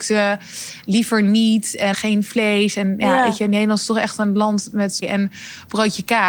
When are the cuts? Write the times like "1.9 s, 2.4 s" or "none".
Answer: 1.9 s, 5.0 s